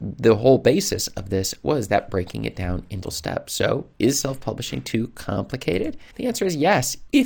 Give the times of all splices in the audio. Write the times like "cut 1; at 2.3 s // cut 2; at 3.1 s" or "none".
cut 1; at 3.0 s // cut 2; at 6.1 s